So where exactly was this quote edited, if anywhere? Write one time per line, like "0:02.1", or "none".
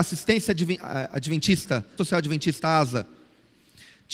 0:02.0